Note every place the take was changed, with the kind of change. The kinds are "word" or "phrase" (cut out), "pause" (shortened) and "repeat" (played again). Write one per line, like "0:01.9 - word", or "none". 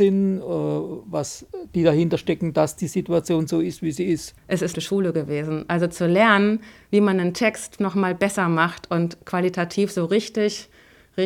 0:04.4 - pause
0:04.7 - phrase
0:07.8 - word